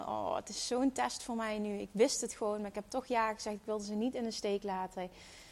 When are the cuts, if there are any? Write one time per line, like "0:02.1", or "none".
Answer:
none